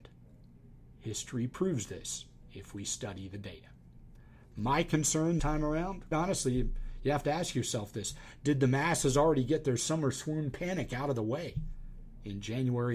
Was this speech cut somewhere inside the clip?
yes; 2 cuts; at 5.4 s, 6.1 s

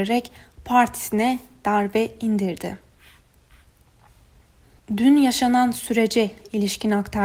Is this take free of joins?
yes; 0 cuts

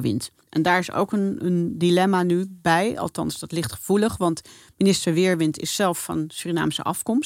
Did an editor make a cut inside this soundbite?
no; 0 cuts

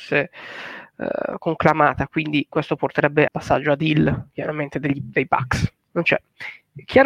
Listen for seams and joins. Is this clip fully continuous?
no; 2 cuts; at 3.3 s, 5.9 s

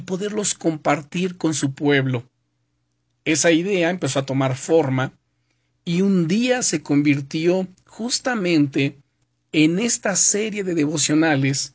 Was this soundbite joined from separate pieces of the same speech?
no; 0 cuts

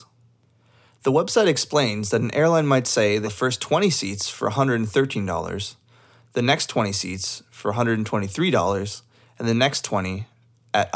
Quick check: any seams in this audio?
yes; 1 cut; at 3.2 s

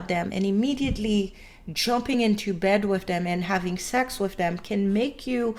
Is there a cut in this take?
no; 0 cuts

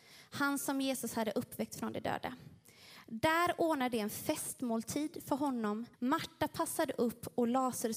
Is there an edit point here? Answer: yes; 1 cut; at 5.9 s

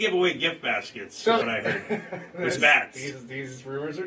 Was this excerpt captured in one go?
no; 2 cuts; at 1.4 s, 2.6 s

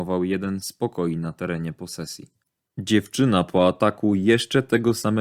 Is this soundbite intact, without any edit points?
yes; 0 cuts

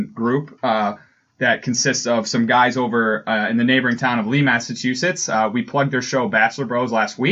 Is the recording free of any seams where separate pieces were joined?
yes; 0 cuts

